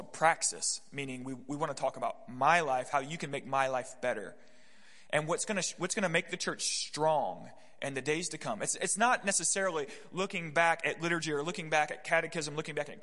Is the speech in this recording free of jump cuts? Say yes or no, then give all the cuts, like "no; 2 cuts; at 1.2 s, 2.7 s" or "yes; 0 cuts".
yes; 0 cuts